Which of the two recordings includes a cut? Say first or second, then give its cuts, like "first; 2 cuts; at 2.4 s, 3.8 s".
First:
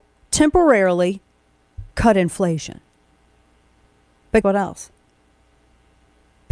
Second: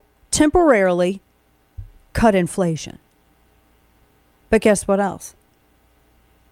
first; 2 cuts; at 1.9 s, 4.4 s